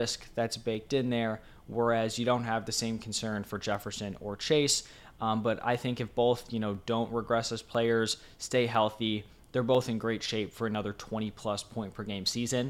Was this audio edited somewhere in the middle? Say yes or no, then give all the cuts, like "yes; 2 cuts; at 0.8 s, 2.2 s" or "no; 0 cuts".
no; 0 cuts